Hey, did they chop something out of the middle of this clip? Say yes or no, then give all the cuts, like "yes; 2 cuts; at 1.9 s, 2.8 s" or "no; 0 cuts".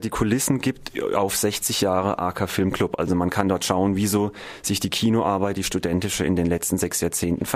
no; 0 cuts